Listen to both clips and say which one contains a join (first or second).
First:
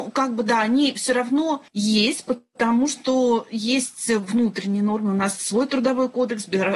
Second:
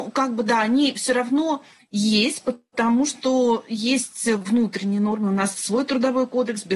first